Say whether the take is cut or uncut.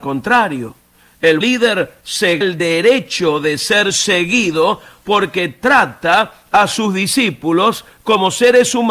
cut